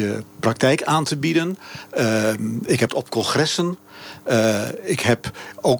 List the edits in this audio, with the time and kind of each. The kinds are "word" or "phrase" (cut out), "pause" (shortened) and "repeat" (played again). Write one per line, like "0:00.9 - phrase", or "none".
0:02.9 - word

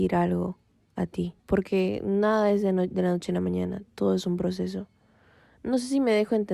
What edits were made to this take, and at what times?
0:01.4 - pause

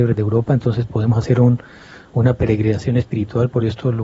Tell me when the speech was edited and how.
none

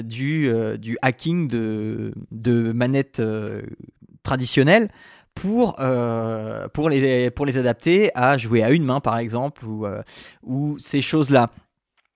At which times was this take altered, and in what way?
none

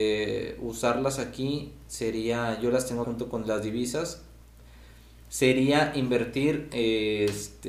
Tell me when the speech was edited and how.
0:03.0 - word

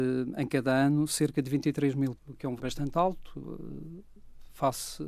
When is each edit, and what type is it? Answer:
0:02.1 - word
0:02.6 - word

